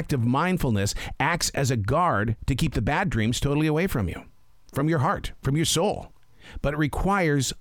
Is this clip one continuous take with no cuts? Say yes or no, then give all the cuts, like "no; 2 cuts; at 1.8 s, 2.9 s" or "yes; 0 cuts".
yes; 0 cuts